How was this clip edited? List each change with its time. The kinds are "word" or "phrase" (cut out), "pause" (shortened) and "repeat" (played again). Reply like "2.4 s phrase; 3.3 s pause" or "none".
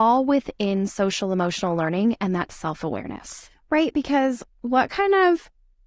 none